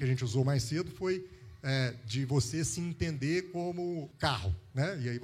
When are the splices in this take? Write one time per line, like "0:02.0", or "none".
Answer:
0:04.1